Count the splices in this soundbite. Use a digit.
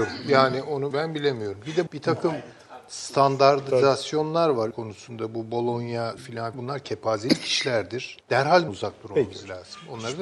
7